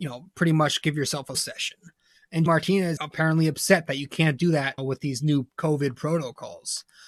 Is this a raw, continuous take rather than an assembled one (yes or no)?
no